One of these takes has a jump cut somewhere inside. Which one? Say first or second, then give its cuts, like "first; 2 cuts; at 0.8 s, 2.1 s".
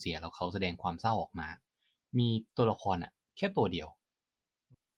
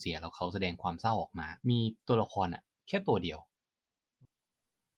second; 1 cut; at 1.6 s